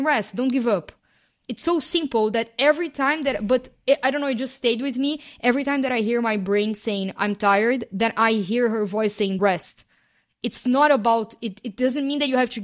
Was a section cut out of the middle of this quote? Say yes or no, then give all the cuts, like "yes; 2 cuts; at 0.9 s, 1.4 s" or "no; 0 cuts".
yes; 1 cut; at 9.4 s